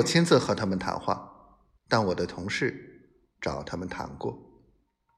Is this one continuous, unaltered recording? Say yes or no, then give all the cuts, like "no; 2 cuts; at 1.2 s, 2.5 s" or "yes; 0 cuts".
no; 1 cut; at 1.8 s